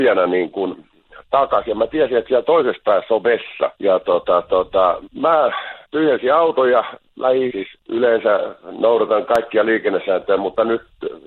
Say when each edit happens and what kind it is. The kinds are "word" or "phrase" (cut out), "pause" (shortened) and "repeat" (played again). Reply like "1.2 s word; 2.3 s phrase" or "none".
3.7 s pause; 5.8 s pause; 7.5 s word

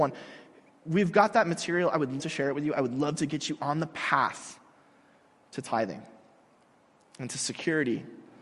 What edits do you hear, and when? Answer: 2.2 s word

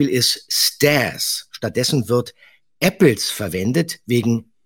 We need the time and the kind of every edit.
none

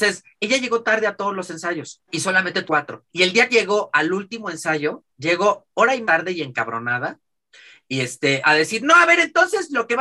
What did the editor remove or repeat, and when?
2.1 s pause; 2.7 s word; 3.1 s pause; 3.5 s word; 5.1 s pause; 6.0 s word; 8.4 s word

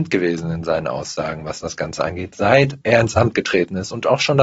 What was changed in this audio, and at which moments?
2.8 s pause

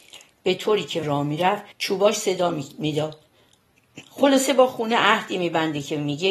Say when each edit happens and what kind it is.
1.0 s word; 1.7 s pause

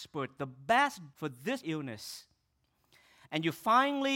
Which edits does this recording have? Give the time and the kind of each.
1.1 s word; 1.6 s word

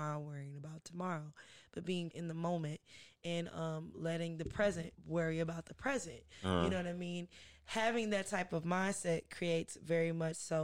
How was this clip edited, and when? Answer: 2.1 s word; 4.9 s pause

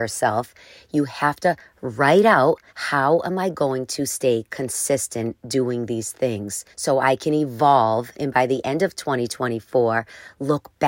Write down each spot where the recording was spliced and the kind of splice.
2.7 s pause; 6.7 s pause

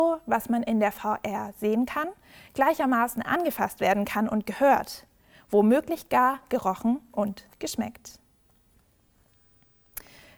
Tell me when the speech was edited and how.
none

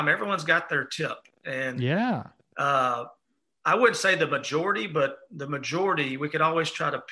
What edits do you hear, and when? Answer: none

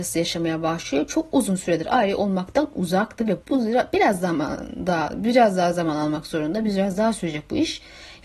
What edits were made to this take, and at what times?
3.4 s word

